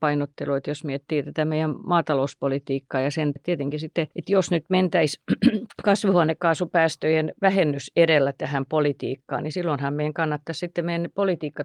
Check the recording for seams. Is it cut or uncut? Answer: cut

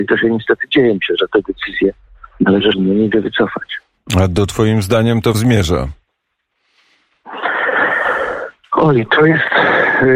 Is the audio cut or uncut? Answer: cut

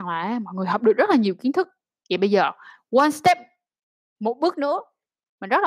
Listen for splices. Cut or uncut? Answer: uncut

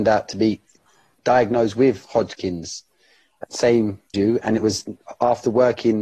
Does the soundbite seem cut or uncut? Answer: cut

